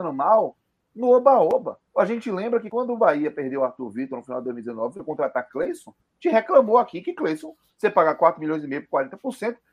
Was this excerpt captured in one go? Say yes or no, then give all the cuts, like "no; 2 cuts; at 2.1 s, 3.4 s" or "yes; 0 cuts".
no; 1 cut; at 1.9 s